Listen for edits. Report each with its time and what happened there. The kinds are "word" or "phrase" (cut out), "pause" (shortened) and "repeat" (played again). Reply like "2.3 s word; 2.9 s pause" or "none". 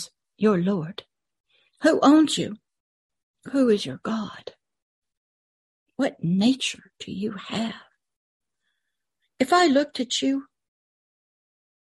none